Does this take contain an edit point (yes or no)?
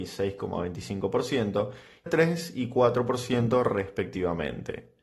yes